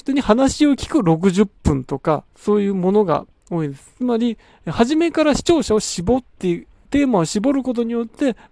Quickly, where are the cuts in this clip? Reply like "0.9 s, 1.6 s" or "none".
2.3 s, 6.9 s